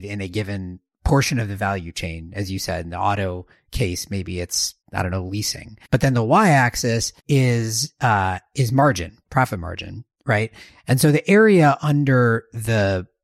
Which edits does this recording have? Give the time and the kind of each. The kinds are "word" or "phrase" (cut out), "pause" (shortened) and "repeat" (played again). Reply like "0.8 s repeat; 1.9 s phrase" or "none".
4.8 s pause; 5.8 s pause; 7.2 s pause